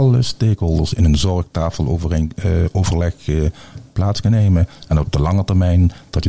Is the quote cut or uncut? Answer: uncut